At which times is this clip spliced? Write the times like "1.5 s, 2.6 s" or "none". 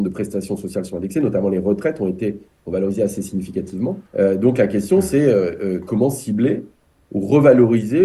4.1 s